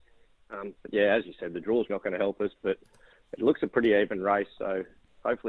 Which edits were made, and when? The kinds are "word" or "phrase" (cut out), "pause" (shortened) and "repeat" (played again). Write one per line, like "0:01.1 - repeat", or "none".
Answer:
0:01.9 - word